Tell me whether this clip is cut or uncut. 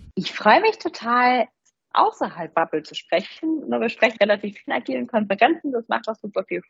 cut